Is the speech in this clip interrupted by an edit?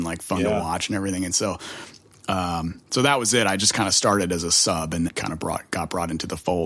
yes; 1 cut; at 5.1 s

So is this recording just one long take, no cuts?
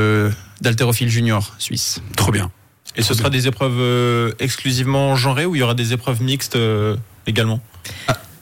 yes; 0 cuts

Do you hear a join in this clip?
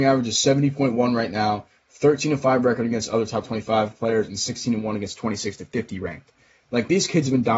no; 0 cuts

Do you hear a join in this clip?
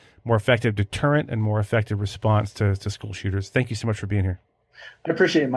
no; 0 cuts

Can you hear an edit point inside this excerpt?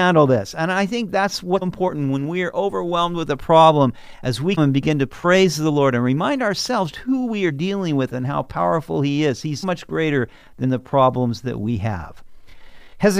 yes; 4 cuts; at 1.6 s, 4.6 s, 6.9 s, 9.6 s

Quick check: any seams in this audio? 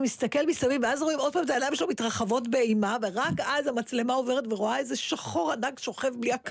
no; 0 cuts

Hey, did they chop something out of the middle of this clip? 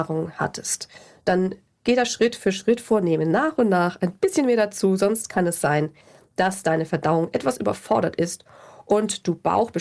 no; 0 cuts

